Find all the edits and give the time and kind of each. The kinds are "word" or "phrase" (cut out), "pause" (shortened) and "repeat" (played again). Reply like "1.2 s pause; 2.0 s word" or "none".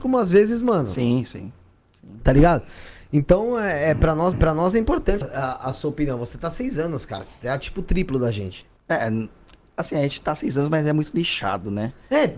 4.3 s repeat; 5.2 s word; 8.8 s pause